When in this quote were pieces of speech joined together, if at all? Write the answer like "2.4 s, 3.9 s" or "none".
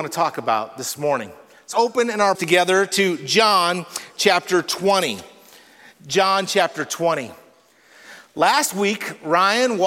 1.7 s, 2.3 s